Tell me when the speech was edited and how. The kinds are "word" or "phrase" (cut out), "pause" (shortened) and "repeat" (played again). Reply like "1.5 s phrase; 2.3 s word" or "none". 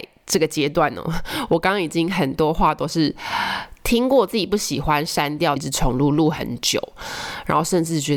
5.6 s phrase